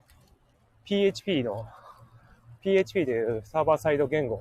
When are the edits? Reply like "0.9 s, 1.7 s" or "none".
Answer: 2.6 s